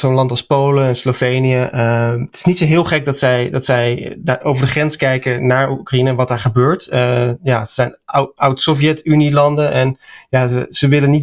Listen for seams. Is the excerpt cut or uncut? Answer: uncut